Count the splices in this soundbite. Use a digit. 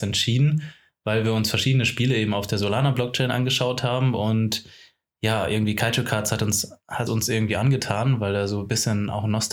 1